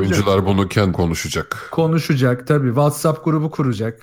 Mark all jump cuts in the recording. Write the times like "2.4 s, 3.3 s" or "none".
0.9 s

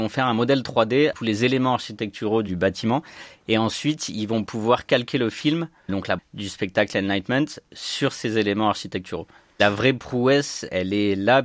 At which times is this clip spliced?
1.1 s, 5.9 s, 6.2 s

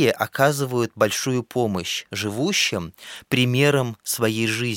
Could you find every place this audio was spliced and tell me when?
none

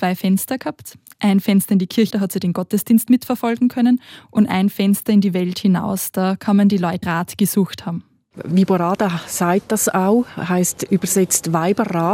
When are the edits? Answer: 2.1 s, 7.0 s

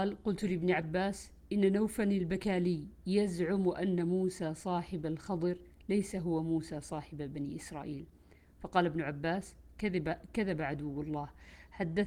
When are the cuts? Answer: none

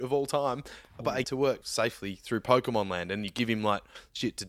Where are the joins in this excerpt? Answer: 1.2 s, 1.6 s

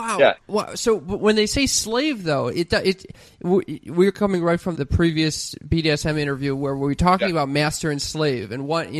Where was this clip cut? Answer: 4.7 s

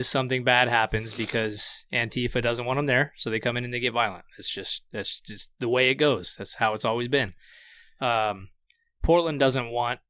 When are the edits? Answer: none

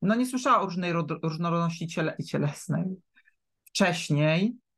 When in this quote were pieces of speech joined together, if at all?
2.2 s

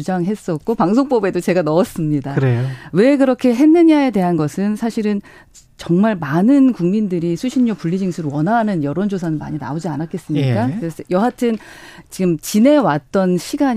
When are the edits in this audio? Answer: none

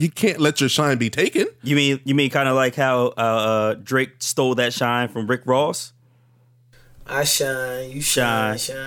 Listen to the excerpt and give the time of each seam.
none

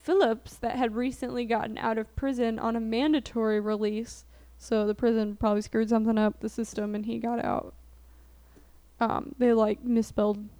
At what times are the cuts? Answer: 6.4 s

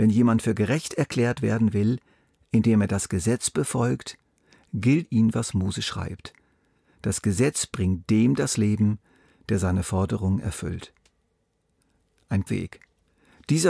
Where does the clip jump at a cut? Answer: 5.0 s, 12.5 s

